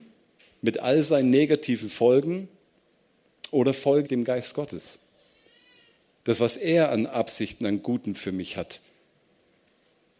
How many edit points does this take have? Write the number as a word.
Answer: one